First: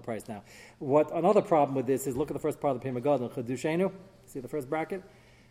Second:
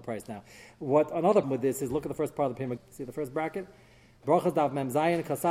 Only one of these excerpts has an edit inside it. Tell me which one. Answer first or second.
second